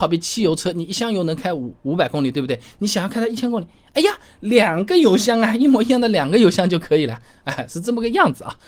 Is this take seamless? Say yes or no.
yes